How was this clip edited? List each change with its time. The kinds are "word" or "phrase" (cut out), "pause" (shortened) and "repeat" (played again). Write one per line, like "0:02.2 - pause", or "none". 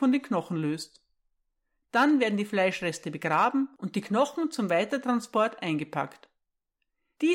none